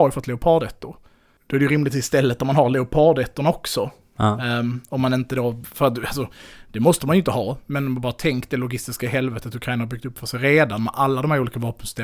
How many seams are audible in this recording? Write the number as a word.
zero